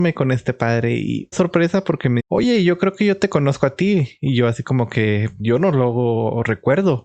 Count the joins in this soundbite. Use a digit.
3